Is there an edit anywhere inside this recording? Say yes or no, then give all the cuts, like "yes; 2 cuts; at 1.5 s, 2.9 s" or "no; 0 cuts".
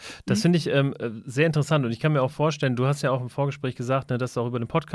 no; 0 cuts